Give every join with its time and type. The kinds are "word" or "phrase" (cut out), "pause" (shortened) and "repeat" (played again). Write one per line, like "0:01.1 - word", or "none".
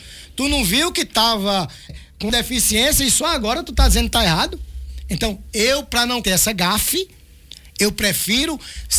0:01.9 - word
0:02.3 - word
0:06.2 - word